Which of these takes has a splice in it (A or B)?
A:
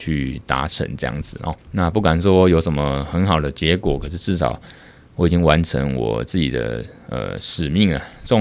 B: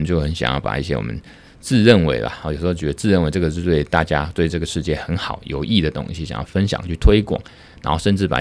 A